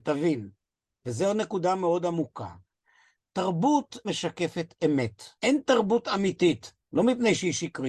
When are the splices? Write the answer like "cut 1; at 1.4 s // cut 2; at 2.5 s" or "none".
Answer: cut 1; at 4.0 s // cut 2; at 5.4 s // cut 3; at 6.8 s